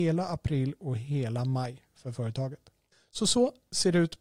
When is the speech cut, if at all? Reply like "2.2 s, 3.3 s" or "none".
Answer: 2.9 s